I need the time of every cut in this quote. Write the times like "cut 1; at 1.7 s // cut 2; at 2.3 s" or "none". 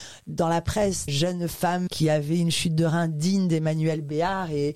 cut 1; at 1.1 s // cut 2; at 1.9 s